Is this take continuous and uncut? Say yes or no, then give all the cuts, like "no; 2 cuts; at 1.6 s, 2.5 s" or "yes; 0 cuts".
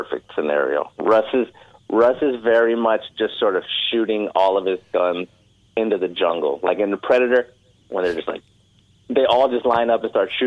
yes; 0 cuts